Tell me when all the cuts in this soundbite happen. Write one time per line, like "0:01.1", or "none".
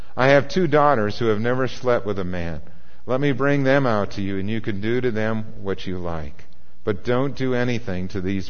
none

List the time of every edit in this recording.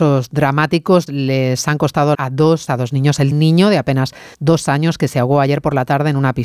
0:01.1
0:02.1
0:02.7
0:03.3
0:04.3

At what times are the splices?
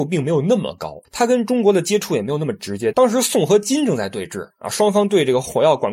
0:01.0

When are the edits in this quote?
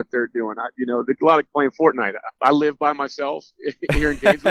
0:01.5

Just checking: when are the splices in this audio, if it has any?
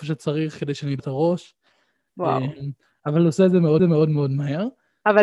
0:01.0
0:03.8

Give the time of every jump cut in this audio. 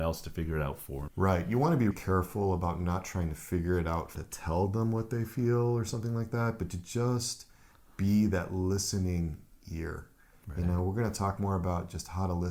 0:01.1
0:01.9
0:04.1

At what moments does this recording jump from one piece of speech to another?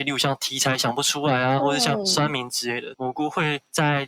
0:02.9

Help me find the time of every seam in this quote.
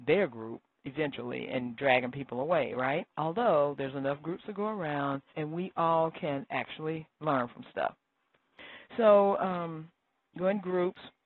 0:03.1
0:05.3

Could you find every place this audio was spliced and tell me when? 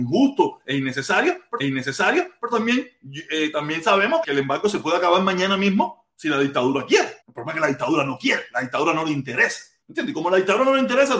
0:01.6
0:04.2
0:07.2
0:09.8

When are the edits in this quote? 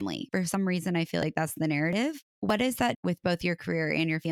0:02.9

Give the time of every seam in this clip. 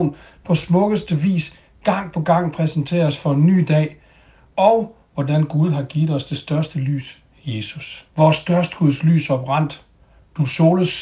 0:08.1

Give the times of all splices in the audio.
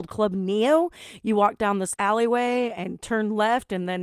0:01.9

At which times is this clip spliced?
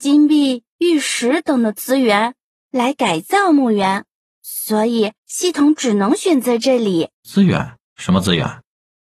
0:05.2
0:07.1
0:07.9

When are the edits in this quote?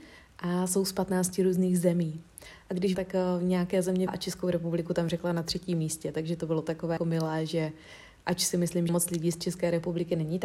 0:02.9
0:04.1
0:07.0
0:08.9

